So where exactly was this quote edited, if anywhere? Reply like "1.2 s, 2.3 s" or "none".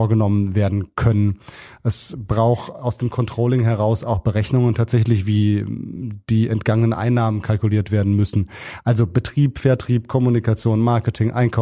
none